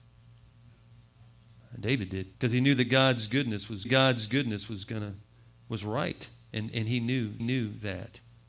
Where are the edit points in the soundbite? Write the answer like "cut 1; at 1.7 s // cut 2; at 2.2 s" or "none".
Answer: cut 1; at 2.3 s // cut 2; at 3.8 s // cut 3; at 7.4 s